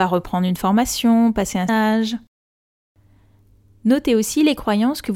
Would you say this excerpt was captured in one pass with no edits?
no; 1 cut; at 1.7 s

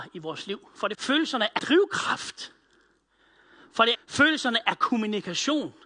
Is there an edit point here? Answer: yes; 3 cuts; at 0.9 s, 1.6 s, 3.9 s

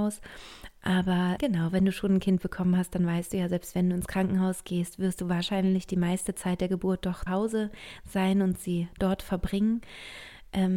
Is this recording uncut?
no; 2 cuts; at 1.4 s, 7.3 s

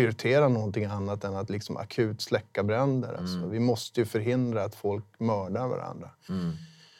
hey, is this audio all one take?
yes; 0 cuts

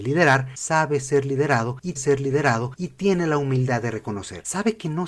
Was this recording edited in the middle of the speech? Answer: yes; 1 cut; at 2.0 s

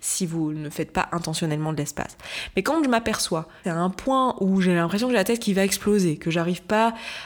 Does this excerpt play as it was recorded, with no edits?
no; 1 cut; at 3.6 s

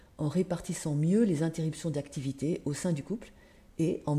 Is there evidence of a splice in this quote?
no; 0 cuts

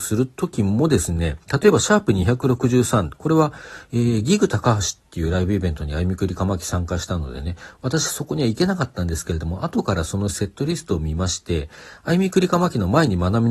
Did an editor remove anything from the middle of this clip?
yes; 1 cut; at 1.4 s

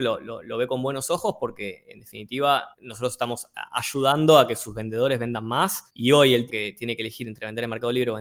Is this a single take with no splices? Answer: no; 3 cuts; at 2.7 s, 5.9 s, 6.5 s

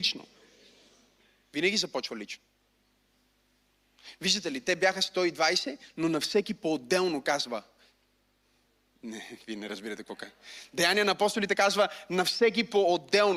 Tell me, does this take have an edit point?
no; 0 cuts

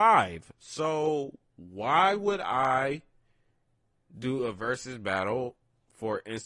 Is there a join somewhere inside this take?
no; 0 cuts

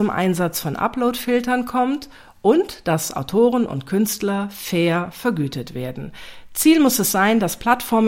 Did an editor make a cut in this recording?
no; 0 cuts

